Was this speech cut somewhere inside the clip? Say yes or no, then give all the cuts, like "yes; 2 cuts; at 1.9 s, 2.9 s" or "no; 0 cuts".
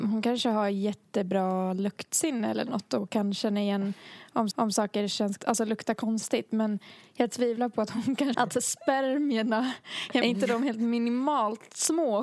yes; 4 cuts; at 4.5 s, 5.4 s, 8.3 s, 10.2 s